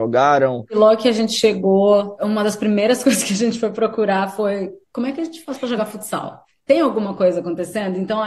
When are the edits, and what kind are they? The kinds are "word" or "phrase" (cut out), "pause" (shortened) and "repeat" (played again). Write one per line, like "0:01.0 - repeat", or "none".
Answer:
none